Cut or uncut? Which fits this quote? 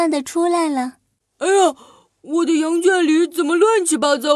uncut